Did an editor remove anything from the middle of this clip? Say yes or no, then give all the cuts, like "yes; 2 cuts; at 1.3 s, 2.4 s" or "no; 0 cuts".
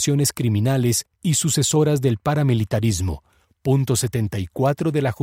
no; 0 cuts